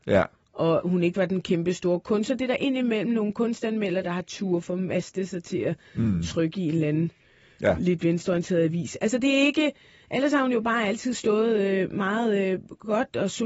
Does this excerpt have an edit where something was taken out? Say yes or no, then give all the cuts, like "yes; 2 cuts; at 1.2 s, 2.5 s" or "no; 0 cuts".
no; 0 cuts